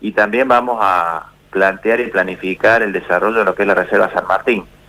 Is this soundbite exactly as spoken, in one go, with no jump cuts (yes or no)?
yes